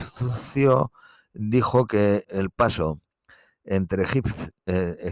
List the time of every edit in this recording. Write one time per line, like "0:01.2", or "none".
0:02.2